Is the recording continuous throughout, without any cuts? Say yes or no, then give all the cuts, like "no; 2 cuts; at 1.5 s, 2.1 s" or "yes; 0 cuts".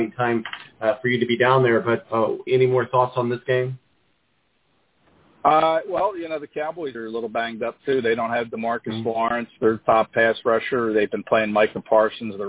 no; 3 cuts; at 2.0 s, 2.5 s, 6.9 s